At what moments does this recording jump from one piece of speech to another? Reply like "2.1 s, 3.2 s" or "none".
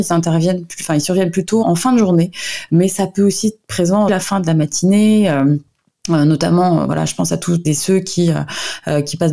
1.6 s, 4.1 s, 7.6 s